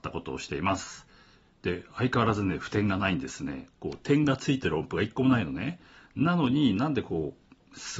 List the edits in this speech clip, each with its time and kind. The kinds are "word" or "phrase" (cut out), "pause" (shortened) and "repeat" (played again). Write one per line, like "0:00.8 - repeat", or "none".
none